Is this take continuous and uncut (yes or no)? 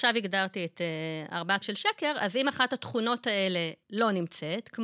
no